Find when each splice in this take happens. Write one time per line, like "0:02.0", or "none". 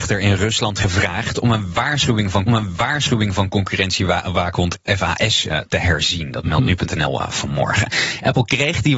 0:02.5